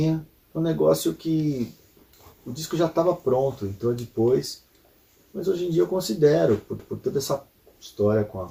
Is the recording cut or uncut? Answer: cut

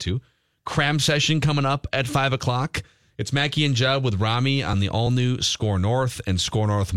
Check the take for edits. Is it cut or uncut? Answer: uncut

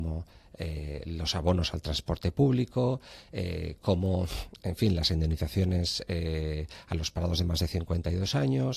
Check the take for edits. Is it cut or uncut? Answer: uncut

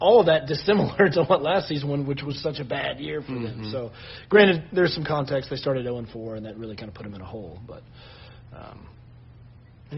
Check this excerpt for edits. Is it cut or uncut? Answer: uncut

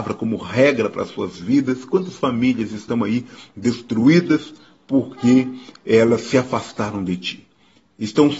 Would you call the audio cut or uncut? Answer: uncut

